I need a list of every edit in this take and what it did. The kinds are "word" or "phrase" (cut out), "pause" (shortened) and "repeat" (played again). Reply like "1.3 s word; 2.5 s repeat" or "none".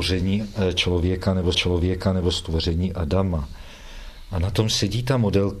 1.5 s repeat

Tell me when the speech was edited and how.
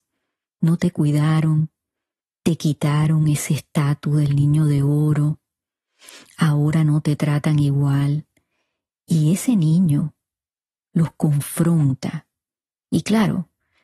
none

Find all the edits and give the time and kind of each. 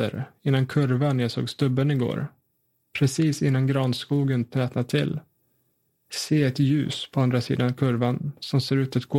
none

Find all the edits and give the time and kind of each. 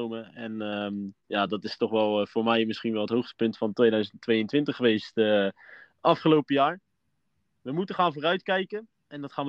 none

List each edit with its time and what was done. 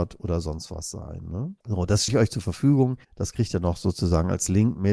1.6 s pause; 2.1 s word; 3.0 s pause

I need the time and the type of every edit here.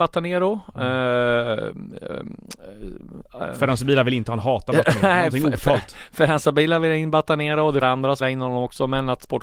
7.8 s word; 8.2 s word

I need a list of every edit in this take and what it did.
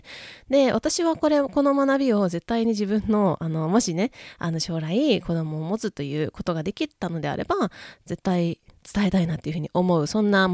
none

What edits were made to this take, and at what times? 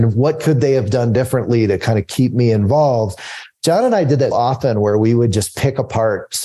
4.3 s word

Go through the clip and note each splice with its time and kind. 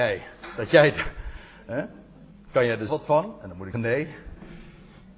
2.9 s word; 3.7 s word

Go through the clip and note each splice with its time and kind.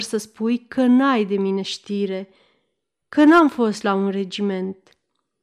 none

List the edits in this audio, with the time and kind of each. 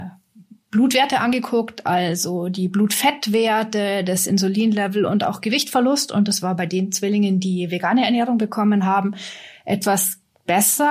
none

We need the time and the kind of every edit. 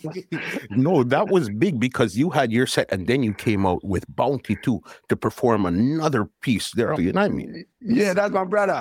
7.0 s word; 7.7 s pause

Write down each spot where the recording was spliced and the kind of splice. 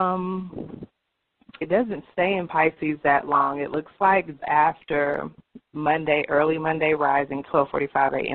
1.6 s word; 4.4 s word

